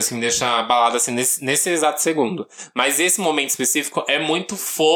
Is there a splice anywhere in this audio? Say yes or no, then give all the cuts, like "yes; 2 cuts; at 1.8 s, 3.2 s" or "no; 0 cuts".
no; 0 cuts